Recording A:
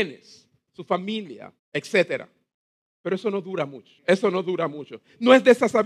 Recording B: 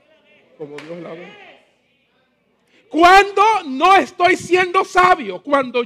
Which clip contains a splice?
A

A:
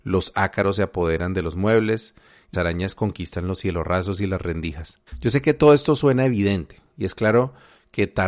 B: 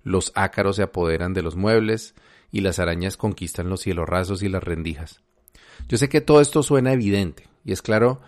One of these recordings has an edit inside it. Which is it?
A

